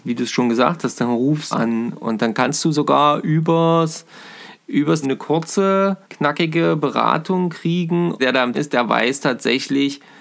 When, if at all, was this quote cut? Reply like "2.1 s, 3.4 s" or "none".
1.5 s, 5.0 s, 6.0 s, 8.2 s, 8.5 s